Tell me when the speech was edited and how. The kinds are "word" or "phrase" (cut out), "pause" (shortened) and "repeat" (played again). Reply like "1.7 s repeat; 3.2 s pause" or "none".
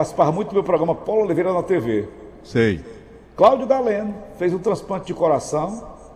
none